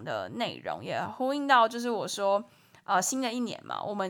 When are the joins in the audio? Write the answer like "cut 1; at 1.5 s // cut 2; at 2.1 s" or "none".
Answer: none